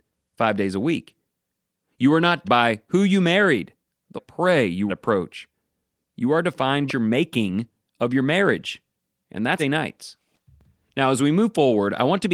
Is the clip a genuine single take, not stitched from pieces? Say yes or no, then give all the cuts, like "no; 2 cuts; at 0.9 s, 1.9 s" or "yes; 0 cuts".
no; 5 cuts; at 2.4 s, 4.2 s, 4.9 s, 6.9 s, 9.6 s